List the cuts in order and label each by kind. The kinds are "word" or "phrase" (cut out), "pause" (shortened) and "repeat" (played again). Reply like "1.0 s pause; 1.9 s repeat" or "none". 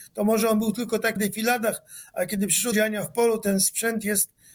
1.2 s word; 2.7 s word